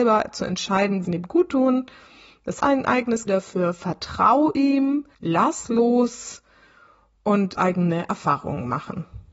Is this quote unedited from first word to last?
no; 5 cuts; at 1.0 s, 2.6 s, 3.3 s, 5.1 s, 7.5 s

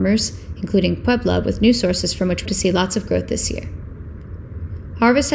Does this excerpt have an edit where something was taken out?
yes; 1 cut; at 2.4 s

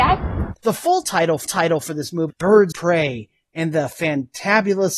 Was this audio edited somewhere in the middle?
yes; 3 cuts; at 1.4 s, 2.3 s, 2.7 s

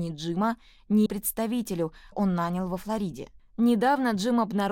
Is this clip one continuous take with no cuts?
no; 3 cuts; at 1.1 s, 2.1 s, 3.5 s

